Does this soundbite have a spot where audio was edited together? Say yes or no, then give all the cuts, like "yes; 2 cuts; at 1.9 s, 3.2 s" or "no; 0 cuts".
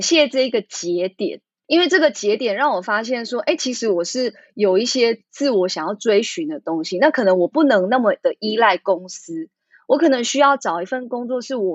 no; 0 cuts